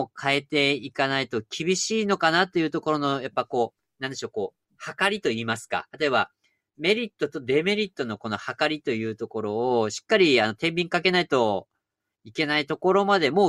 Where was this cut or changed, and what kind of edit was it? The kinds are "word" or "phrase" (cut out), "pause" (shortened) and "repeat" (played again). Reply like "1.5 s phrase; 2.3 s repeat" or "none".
5.9 s pause